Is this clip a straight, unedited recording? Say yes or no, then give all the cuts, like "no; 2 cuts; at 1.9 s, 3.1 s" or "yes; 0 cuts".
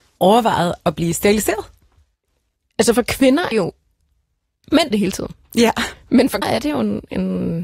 no; 4 cuts; at 2.0 s, 3.5 s, 4.9 s, 6.4 s